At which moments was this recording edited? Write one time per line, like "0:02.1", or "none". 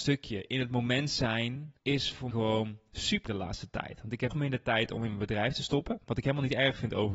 0:01.8
0:02.3
0:03.3
0:04.3